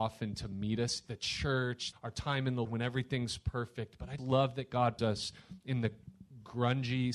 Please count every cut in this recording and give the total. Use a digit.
5